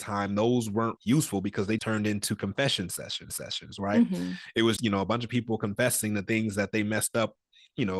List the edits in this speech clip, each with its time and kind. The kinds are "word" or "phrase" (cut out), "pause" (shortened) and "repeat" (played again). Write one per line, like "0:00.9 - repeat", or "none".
0:01.0 - word
0:01.8 - word
0:03.3 - repeat
0:04.8 - word